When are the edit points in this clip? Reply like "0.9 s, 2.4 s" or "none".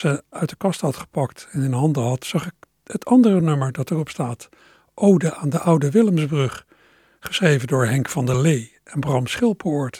none